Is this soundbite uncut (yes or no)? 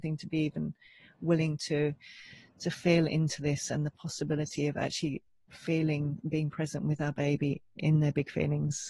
yes